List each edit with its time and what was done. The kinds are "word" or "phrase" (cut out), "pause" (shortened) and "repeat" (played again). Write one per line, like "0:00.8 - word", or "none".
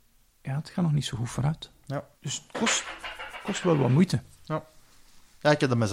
0:02.1 - pause
0:03.6 - word